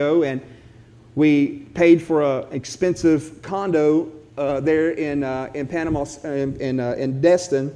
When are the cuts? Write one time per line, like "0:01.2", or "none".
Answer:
none